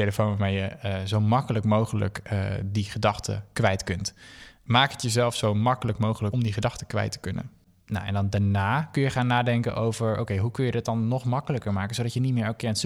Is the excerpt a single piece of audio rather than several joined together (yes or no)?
yes